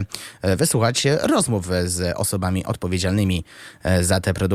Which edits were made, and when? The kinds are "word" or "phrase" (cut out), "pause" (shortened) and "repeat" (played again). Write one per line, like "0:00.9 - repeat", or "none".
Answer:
none